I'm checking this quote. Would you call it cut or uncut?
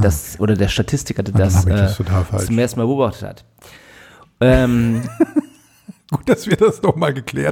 uncut